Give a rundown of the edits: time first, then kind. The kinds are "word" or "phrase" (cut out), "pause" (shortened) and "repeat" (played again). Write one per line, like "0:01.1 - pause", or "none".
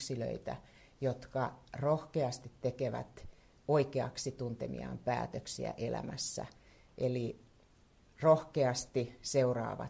none